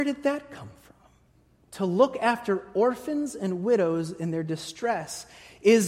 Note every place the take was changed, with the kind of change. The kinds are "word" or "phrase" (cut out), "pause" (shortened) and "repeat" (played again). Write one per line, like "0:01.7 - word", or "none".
none